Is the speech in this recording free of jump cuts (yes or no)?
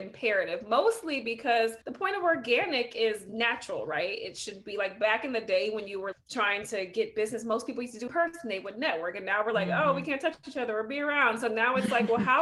no